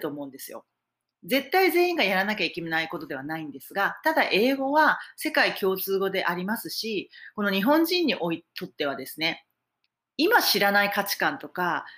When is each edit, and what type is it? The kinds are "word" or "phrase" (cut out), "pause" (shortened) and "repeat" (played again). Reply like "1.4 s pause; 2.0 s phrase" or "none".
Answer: 9.9 s pause

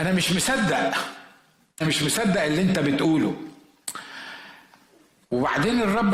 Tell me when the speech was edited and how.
1.8 s word

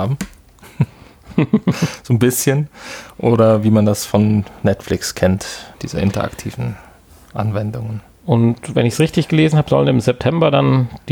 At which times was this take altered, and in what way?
5.7 s pause

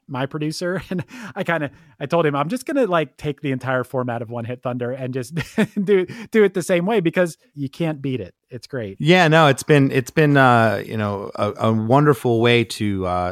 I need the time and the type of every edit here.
none

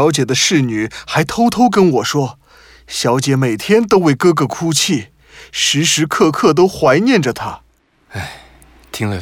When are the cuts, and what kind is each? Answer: none

